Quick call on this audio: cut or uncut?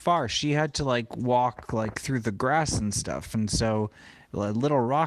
uncut